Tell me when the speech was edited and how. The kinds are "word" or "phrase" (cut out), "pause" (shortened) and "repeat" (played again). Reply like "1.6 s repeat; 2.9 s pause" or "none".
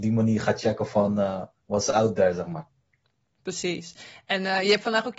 1.6 s pause